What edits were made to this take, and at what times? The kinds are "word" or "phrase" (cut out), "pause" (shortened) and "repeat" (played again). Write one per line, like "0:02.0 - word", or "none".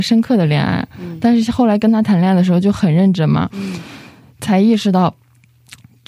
none